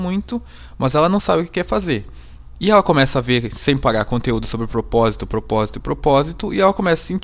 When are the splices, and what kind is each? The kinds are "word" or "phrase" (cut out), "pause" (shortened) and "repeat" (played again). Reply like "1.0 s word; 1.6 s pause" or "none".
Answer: none